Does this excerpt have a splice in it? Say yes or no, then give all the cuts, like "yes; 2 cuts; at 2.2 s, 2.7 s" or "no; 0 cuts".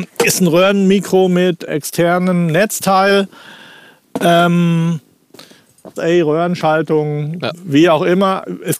yes; 2 cuts; at 1.7 s, 6.0 s